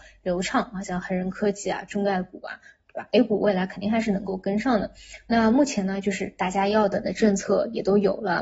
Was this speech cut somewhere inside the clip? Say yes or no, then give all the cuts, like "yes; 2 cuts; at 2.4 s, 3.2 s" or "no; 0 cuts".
no; 0 cuts